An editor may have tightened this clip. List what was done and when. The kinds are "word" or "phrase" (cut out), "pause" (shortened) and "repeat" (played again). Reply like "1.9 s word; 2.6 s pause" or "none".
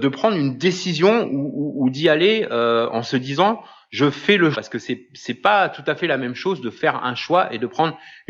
4.5 s word